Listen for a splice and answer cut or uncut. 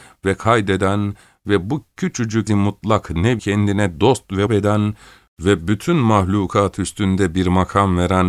cut